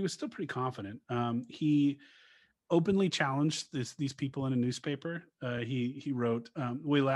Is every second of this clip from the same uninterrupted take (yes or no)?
yes